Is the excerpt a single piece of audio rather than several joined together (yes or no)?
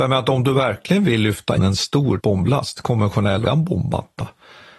no